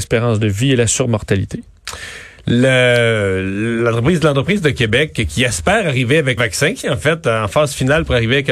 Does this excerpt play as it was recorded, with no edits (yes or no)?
no